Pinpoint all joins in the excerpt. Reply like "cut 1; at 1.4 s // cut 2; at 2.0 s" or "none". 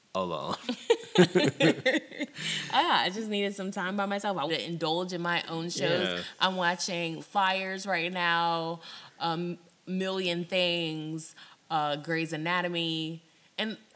cut 1; at 4.5 s // cut 2; at 7.2 s